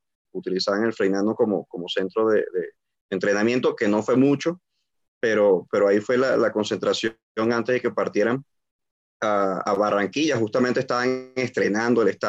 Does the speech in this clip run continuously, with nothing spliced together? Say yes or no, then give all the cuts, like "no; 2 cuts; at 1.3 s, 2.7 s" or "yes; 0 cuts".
yes; 0 cuts